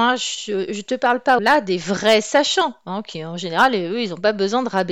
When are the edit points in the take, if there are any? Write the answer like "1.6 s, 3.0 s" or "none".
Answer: 1.4 s